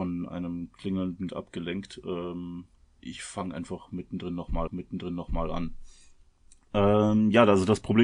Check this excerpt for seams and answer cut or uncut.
cut